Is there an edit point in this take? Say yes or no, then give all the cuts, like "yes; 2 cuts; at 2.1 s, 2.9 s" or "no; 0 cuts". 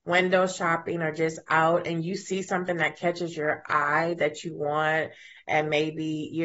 no; 0 cuts